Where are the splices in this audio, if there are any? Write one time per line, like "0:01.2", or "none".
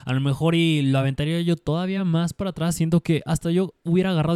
none